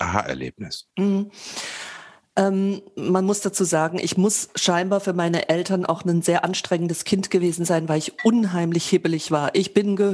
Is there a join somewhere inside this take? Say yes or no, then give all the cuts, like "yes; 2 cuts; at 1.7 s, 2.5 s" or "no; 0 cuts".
yes; 1 cut; at 0.9 s